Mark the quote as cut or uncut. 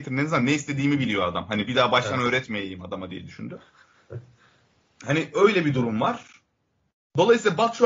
uncut